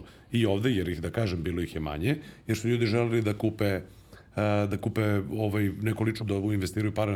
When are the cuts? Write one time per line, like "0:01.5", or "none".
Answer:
0:06.2

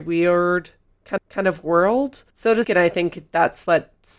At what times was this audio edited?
0:01.2
0:02.3
0:02.6

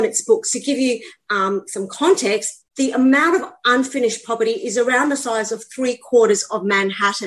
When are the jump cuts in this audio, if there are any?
0:02.7

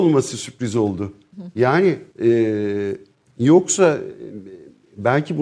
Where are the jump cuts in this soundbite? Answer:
0:02.1

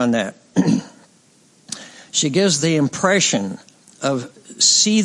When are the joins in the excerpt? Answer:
none

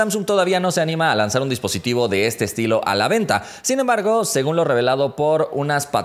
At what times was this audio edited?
none

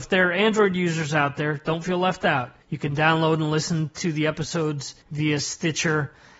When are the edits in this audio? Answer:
0:02.6
0:05.0

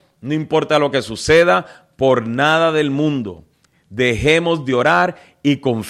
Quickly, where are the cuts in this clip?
none

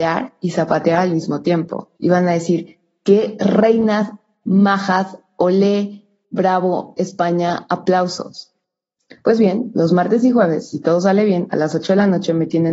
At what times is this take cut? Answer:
0:02.0

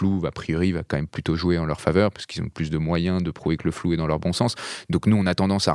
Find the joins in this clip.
none

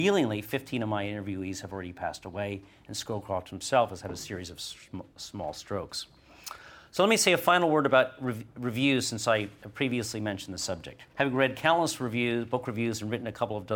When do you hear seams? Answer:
0:11.1

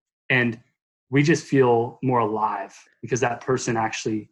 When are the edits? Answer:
none

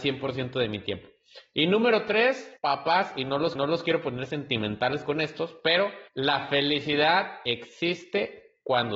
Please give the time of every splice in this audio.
0:02.6
0:03.6
0:06.1
0:07.5

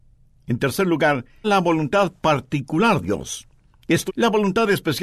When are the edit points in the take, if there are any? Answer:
0:01.4
0:03.0
0:04.1

